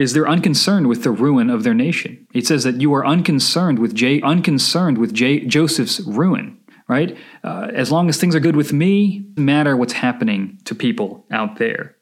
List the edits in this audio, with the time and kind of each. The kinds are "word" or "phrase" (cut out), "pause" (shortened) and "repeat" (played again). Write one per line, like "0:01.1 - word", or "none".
0:04.2 - repeat
0:06.7 - pause
0:08.4 - word
0:09.4 - word